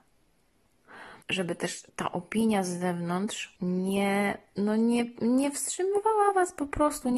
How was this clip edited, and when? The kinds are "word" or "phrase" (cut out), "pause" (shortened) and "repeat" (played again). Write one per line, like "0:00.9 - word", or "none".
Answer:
0:01.2 - pause
0:01.9 - pause
0:03.6 - pause